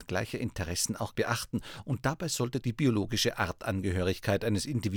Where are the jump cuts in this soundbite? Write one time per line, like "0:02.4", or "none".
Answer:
0:01.1
0:02.6